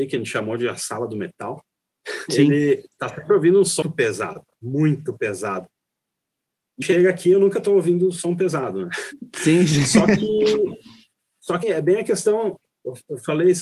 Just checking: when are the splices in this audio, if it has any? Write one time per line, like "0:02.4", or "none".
0:03.8
0:06.8
0:11.6